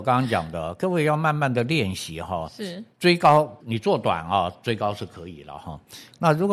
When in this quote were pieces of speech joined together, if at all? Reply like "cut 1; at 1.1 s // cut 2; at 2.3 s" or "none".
cut 1; at 2.9 s // cut 2; at 3.6 s